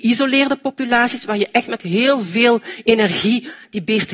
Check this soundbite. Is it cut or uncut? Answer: uncut